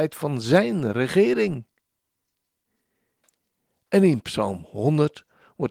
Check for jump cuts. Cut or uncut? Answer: uncut